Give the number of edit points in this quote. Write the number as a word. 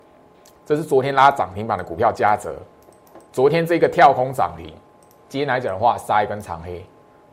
one